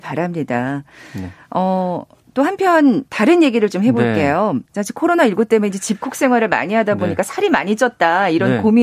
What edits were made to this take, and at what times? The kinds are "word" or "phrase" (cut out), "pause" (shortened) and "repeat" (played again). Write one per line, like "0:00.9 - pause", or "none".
0:03.1 - pause
0:04.6 - pause